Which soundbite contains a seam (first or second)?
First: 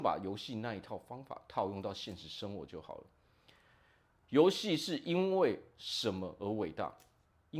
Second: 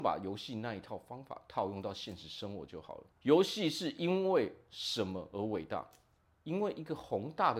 second